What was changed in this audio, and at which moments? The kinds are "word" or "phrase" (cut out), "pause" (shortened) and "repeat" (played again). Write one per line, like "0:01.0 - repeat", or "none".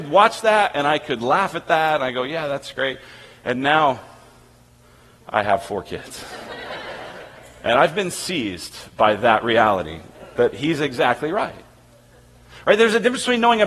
none